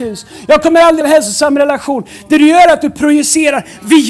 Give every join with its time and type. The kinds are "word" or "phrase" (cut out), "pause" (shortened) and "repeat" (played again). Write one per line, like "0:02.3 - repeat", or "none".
0:01.0 - word